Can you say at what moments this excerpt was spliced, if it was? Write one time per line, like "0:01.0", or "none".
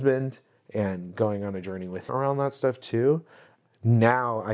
0:02.1